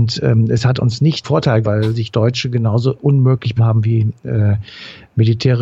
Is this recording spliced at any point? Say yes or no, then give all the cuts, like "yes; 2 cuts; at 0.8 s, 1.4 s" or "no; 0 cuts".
yes; 4 cuts; at 1.2 s, 1.6 s, 2.1 s, 3.6 s